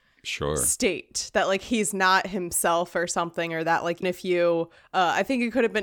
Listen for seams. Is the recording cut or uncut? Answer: cut